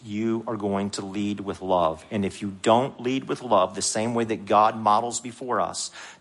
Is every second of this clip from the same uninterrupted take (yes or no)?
yes